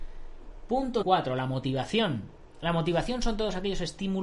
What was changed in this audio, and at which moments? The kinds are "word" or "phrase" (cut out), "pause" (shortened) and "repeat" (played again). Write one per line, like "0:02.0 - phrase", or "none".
0:01.0 - word

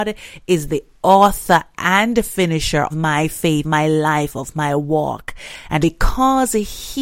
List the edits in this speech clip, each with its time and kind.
0:02.9 - word
0:03.6 - word
0:05.8 - word

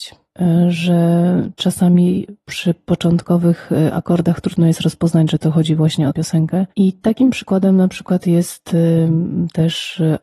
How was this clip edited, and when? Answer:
0:06.1 - word

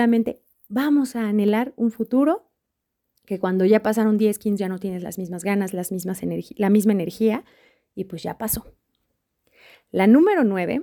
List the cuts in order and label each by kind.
0:04.6 - word

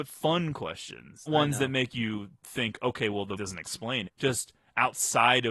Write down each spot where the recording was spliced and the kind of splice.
0:01.3 - word
0:02.4 - pause
0:03.4 - phrase
0:04.1 - phrase

